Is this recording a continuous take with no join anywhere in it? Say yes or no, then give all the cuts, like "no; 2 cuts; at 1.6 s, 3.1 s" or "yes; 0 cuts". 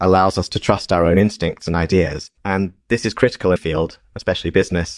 no; 2 cuts; at 2.4 s, 3.6 s